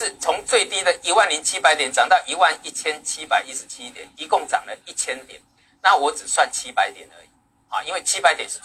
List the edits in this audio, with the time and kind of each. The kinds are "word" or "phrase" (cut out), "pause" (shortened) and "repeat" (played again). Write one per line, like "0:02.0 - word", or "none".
none